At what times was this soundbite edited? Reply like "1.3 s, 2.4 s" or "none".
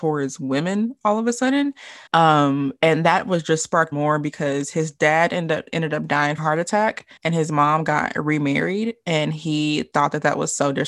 2.1 s, 3.9 s, 6.4 s, 7.2 s